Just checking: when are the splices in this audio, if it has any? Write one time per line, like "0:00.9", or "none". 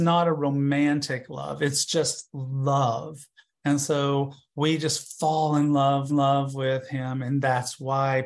0:06.1